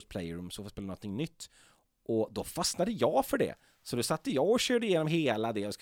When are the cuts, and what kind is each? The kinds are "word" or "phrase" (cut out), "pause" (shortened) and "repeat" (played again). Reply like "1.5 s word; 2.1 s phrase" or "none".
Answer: none